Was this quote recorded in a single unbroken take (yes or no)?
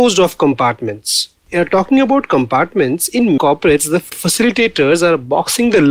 no